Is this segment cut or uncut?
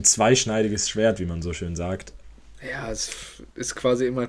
uncut